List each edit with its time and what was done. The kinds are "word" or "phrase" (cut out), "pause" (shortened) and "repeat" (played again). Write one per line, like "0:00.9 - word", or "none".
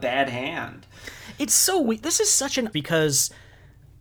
0:02.7 - phrase